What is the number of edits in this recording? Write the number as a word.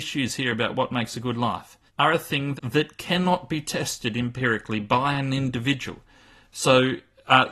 two